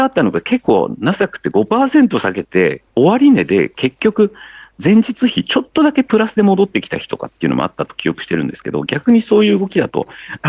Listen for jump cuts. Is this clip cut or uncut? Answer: cut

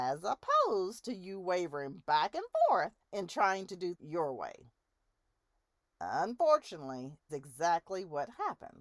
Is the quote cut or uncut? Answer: cut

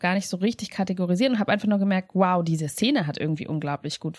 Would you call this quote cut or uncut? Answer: uncut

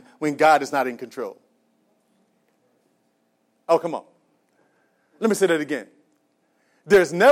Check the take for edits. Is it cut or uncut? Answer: uncut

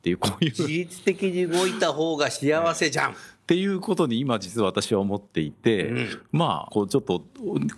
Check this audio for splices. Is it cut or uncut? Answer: uncut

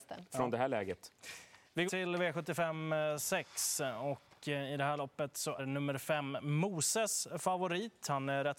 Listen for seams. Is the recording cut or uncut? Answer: cut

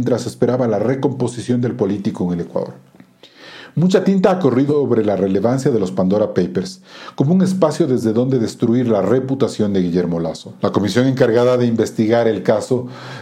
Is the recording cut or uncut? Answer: cut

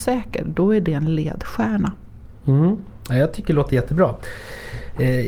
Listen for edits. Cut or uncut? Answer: uncut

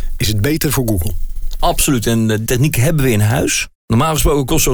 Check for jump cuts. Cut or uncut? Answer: cut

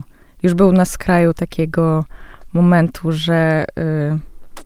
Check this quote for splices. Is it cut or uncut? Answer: uncut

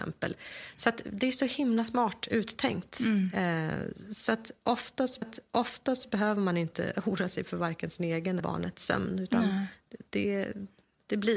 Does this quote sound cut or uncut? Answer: cut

